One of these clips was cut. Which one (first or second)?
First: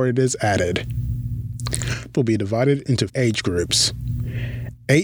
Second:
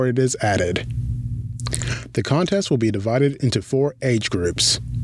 first